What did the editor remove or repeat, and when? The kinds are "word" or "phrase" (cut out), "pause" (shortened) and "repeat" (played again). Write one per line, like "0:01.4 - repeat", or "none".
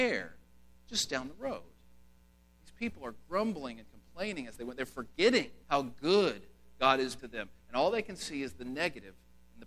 0:05.6 - pause
0:07.2 - word